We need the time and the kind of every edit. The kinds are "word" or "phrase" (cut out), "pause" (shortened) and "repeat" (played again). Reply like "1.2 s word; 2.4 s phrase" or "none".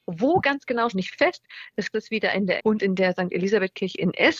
0.9 s phrase; 1.9 s phrase; 2.6 s phrase

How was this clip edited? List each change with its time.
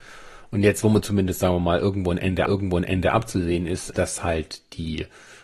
2.5 s repeat; 3.9 s word

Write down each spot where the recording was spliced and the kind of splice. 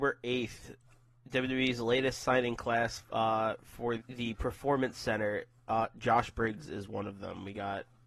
3.0 s pause; 4.0 s word

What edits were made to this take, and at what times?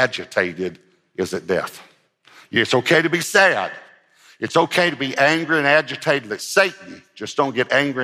none

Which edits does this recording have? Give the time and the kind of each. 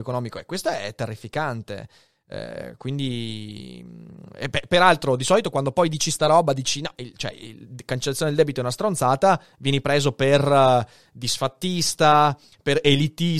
none

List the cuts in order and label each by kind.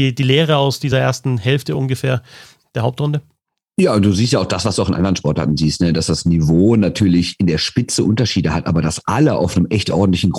none

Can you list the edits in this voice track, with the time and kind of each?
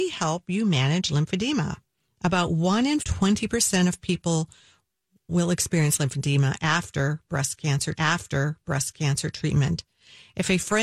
3.0 s phrase; 5.3 s word; 7.9 s repeat

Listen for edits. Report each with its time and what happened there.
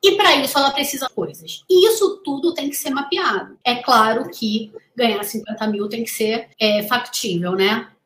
1.1 s phrase; 3.6 s pause; 6.5 s pause

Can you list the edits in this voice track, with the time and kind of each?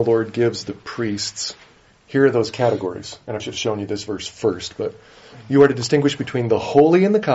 1.8 s pause; 3.4 s word

